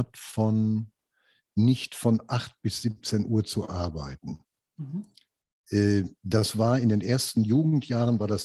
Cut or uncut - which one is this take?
uncut